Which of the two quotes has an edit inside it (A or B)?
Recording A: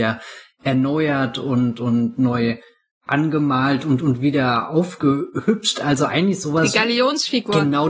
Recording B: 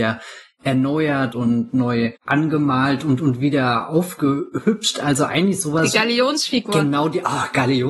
B